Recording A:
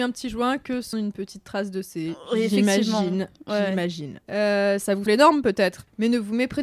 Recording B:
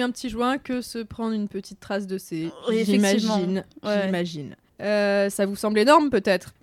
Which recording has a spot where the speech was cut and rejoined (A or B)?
A